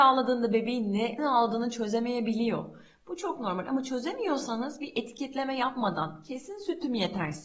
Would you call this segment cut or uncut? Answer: cut